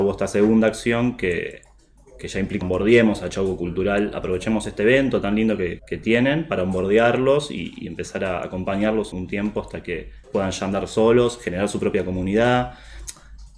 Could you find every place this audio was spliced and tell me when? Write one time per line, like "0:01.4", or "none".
0:02.6
0:05.8
0:09.1
0:10.2